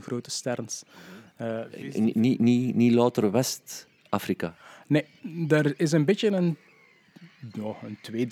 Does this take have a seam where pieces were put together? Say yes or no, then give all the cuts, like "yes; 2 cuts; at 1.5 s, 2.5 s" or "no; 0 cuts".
no; 0 cuts